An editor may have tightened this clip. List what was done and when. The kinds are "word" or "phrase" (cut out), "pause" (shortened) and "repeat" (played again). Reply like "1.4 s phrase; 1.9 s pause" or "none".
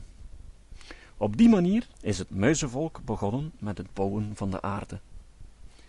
1.9 s pause